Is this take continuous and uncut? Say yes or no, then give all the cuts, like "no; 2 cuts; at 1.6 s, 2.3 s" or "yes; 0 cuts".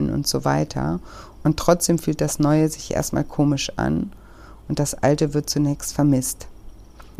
yes; 0 cuts